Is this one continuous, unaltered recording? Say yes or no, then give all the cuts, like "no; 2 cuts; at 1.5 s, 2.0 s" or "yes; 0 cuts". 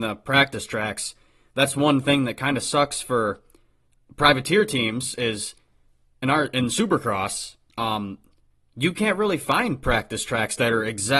yes; 0 cuts